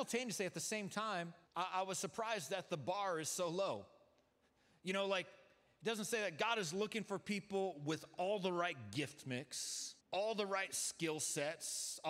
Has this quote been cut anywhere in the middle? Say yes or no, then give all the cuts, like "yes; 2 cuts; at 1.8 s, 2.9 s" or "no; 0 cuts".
yes; 2 cuts; at 1.5 s, 10.0 s